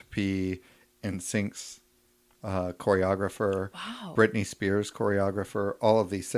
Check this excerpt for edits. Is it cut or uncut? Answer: uncut